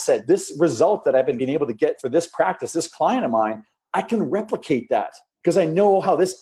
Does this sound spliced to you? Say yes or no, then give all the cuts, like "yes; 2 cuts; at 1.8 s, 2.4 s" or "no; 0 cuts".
no; 0 cuts